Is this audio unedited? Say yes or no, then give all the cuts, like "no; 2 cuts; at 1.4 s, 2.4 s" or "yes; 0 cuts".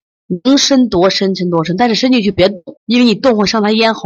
no; 1 cut; at 2.8 s